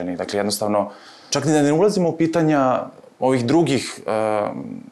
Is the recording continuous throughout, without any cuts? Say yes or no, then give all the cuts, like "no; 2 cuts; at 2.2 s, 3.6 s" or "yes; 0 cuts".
no; 1 cut; at 1.3 s